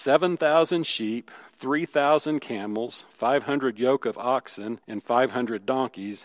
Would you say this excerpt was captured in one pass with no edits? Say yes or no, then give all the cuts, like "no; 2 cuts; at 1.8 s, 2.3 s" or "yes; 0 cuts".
no; 1 cut; at 4.8 s